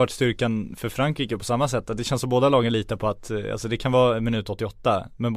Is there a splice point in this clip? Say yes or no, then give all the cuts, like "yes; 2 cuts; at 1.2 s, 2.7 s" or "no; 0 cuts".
no; 0 cuts